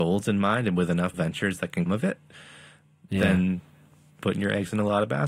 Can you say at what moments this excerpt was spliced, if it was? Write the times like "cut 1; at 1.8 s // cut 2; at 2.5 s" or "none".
cut 1; at 1.1 s // cut 2; at 1.9 s // cut 3; at 4.2 s